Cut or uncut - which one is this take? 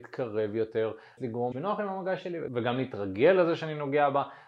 cut